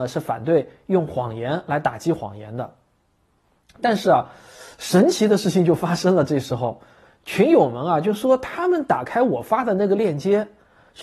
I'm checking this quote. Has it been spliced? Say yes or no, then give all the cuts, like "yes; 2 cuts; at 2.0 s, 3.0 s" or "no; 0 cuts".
no; 0 cuts